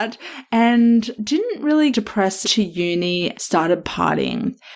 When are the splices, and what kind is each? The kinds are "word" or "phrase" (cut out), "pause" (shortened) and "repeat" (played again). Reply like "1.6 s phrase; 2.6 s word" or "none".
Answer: 1.2 s word; 1.9 s word; 2.4 s phrase; 3.3 s word